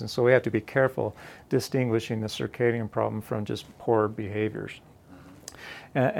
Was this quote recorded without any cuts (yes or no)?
yes